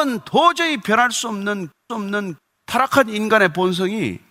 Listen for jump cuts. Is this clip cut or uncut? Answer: cut